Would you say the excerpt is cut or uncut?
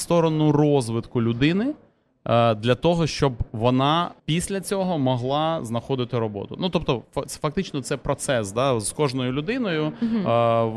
cut